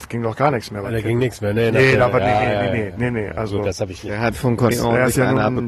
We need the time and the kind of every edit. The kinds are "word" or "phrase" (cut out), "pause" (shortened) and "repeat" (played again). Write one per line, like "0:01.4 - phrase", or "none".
0:04.7 - word